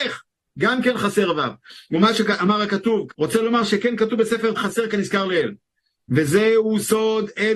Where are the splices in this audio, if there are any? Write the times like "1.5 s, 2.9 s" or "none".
3.1 s, 4.5 s